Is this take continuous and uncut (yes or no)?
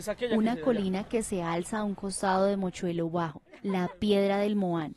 no